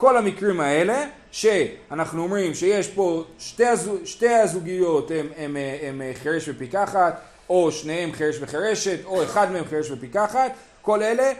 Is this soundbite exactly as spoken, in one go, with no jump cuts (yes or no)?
yes